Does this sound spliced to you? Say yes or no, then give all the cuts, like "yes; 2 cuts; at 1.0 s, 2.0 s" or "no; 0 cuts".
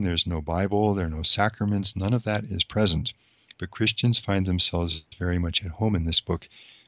no; 0 cuts